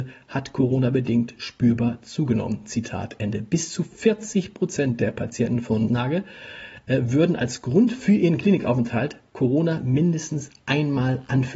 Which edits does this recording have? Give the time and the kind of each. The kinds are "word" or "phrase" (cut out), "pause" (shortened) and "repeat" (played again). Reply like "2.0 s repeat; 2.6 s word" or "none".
5.9 s word